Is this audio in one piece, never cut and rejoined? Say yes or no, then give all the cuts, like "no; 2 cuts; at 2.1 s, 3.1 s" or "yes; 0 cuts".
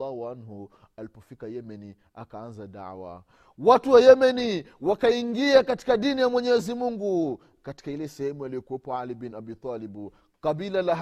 yes; 0 cuts